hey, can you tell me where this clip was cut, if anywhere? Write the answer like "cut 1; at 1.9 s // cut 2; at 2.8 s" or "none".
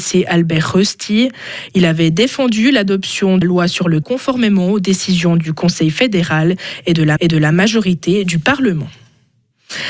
cut 1; at 3.4 s // cut 2; at 4.0 s // cut 3; at 7.2 s